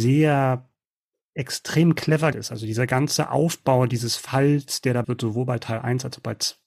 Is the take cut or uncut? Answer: cut